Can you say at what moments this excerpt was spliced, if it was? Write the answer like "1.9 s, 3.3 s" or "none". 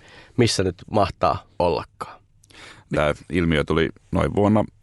1.5 s, 2.9 s